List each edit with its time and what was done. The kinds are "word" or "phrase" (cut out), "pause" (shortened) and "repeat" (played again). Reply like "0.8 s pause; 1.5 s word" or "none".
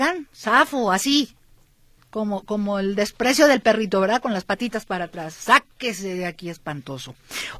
none